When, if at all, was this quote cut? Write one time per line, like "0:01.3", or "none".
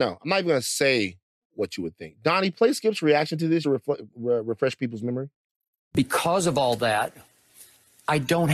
0:03.6